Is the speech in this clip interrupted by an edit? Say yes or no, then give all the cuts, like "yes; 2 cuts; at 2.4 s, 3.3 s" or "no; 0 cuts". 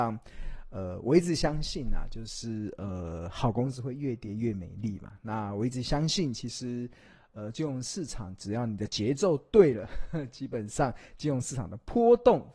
no; 0 cuts